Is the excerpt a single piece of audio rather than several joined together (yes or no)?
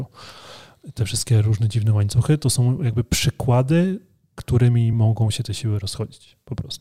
yes